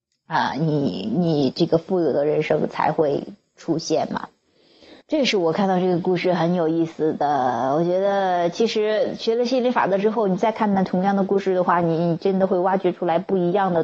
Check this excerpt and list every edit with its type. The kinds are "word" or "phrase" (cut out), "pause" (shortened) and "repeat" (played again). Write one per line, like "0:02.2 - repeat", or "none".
0:05.0 - pause

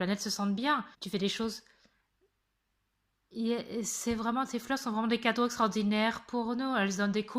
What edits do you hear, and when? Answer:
0:00.9 - pause

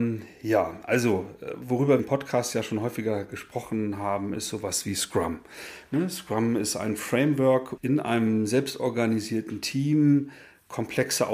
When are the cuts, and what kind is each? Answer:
0:02.0 - phrase
0:07.8 - word

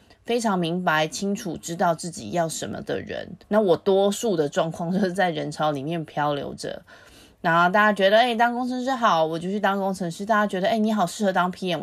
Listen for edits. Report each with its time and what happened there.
0:03.4 - pause

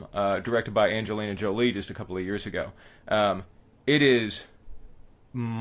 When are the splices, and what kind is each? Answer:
none

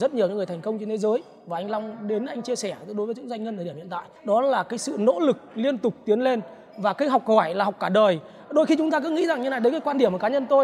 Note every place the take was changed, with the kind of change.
0:04.2 - pause

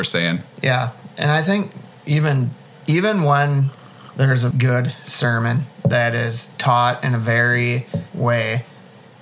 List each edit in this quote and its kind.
0:04.5 - word
0:08.1 - word

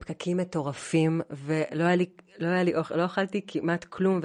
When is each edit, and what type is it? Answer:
none

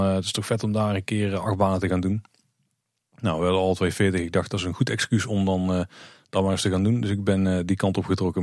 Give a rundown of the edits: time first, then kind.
none

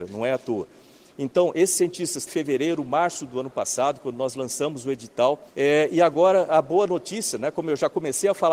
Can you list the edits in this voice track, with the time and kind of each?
0:02.3 - phrase
0:05.5 - pause

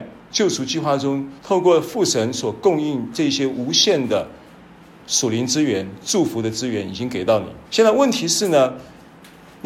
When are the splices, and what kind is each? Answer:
0:01.4 - pause
0:07.7 - pause

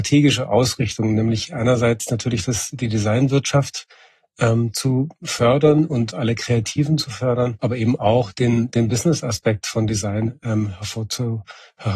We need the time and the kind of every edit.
none

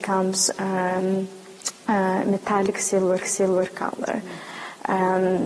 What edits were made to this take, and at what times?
0:03.2 - repeat

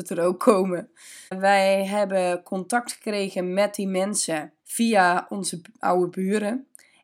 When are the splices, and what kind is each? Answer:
0:01.3 - pause
0:04.6 - pause

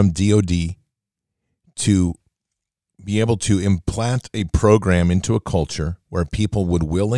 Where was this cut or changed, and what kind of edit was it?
none

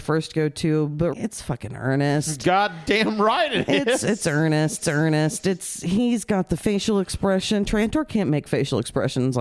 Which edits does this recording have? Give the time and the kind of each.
0:01.1 - word
0:04.8 - repeat

